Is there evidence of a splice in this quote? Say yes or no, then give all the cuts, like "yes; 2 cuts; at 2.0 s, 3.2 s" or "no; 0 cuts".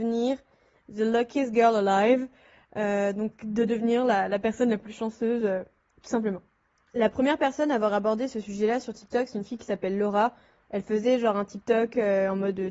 no; 0 cuts